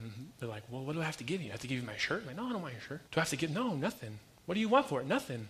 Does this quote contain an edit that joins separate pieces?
yes; 1 cut; at 3.1 s

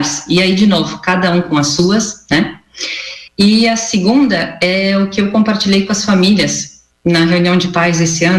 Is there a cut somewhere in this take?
yes; 1 cut; at 3.3 s

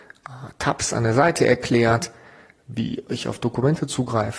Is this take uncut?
yes; 0 cuts

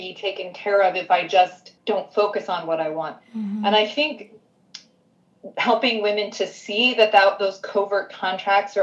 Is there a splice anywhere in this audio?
yes; 1 cut; at 1.8 s

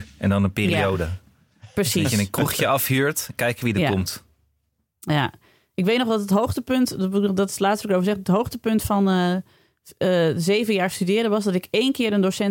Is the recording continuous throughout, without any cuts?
yes; 0 cuts

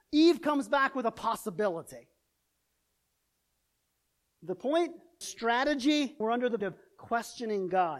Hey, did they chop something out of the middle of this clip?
yes; 3 cuts; at 5.2 s, 6.2 s, 6.6 s

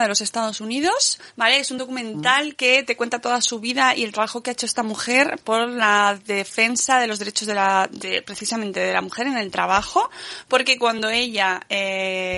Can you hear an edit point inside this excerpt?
no; 0 cuts

